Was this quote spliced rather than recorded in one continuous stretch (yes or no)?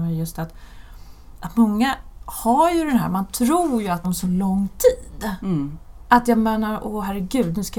yes